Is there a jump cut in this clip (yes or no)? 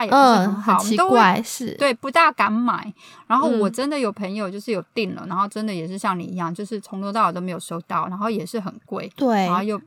no